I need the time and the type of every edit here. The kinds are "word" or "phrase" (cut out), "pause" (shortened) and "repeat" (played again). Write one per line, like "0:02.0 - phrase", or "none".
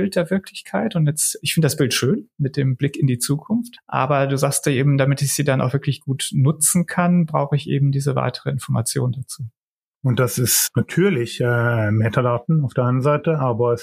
none